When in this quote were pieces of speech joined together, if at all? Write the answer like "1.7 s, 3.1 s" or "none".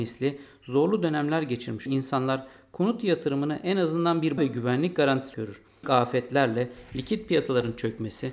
1.9 s, 4.4 s, 5.3 s, 5.8 s